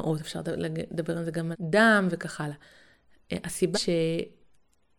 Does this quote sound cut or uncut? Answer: cut